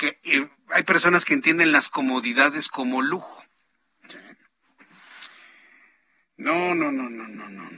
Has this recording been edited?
no; 0 cuts

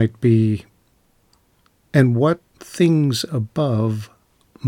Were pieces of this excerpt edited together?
no; 0 cuts

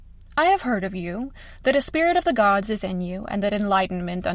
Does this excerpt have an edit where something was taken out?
no; 0 cuts

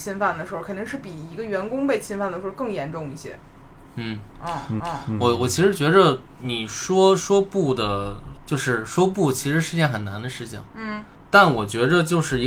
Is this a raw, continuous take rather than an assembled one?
no; 2 cuts; at 4.8 s, 10.7 s

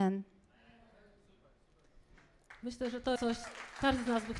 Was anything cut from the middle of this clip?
yes; 1 cut; at 3.2 s

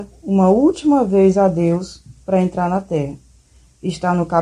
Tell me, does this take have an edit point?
no; 0 cuts

